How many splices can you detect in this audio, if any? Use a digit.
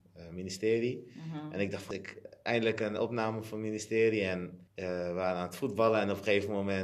2